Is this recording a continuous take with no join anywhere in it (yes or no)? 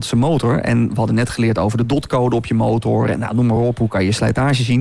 yes